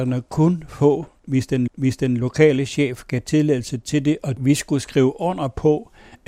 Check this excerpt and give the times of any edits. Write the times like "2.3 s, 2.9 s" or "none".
1.7 s